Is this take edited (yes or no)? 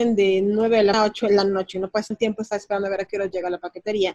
yes